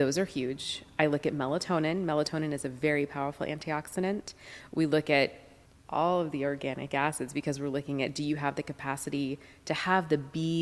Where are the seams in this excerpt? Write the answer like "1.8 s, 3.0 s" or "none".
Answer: 5.7 s